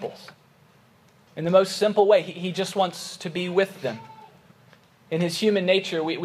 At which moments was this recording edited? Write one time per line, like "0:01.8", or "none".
none